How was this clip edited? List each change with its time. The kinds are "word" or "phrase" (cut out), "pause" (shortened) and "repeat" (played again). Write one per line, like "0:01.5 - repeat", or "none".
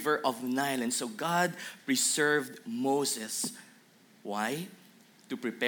none